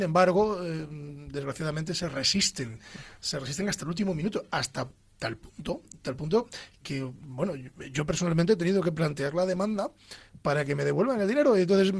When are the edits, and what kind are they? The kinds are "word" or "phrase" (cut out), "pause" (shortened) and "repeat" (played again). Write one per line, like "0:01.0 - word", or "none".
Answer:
0:06.8 - word